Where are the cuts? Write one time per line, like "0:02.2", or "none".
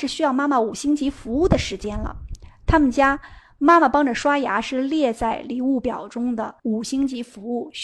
0:06.6

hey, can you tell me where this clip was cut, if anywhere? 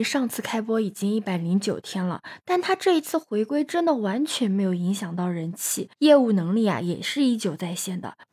0:05.9

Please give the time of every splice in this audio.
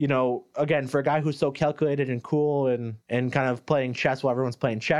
0:03.0

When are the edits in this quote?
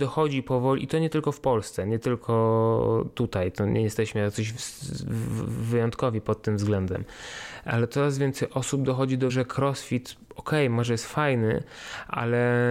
0:09.3

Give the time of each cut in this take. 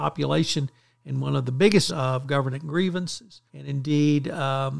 0:01.9
0:03.5

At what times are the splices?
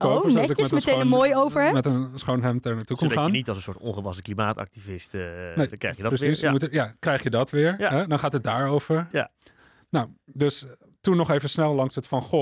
none

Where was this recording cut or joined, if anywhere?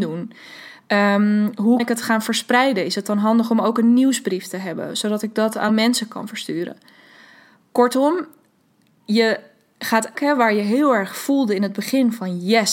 0:01.8
0:05.7
0:10.1

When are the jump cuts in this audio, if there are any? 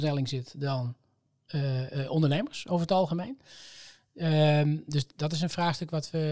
none

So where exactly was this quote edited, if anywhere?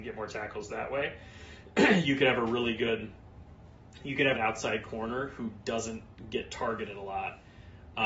0:04.4

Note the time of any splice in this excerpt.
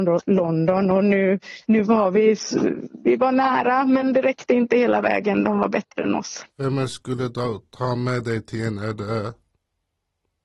0:01.6
0:06.5

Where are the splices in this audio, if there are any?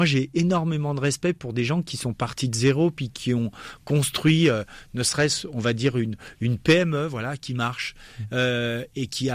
none

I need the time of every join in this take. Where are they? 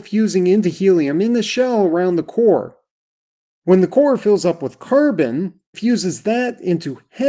0:05.7

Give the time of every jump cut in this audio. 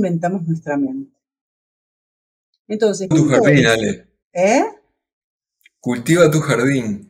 0:03.1
0:04.2

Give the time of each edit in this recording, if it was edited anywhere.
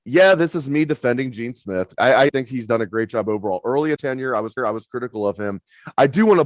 0:02.3
0:04.0
0:04.6

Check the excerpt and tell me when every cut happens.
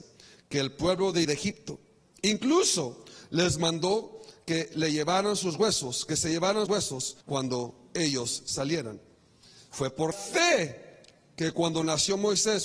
0:01.2
0:06.7
0:07.2
0:10.1

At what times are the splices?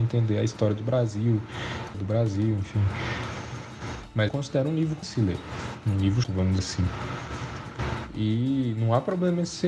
0:01.9
0:04.3
0:05.0
0:06.2
0:06.6

